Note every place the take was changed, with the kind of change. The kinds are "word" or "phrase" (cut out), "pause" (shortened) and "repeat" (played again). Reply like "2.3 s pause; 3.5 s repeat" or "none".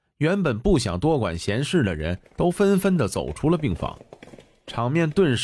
none